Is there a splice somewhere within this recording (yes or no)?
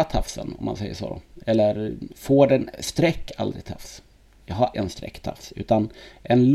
yes